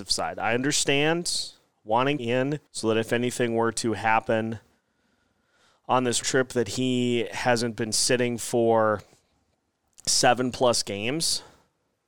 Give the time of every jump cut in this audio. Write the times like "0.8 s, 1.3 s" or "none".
2.2 s, 2.7 s, 6.2 s